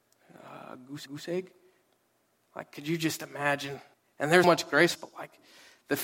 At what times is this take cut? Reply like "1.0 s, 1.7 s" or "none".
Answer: 1.1 s, 3.9 s, 4.4 s, 4.9 s